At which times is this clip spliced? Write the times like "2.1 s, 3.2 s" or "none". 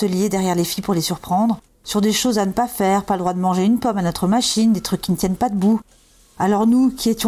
none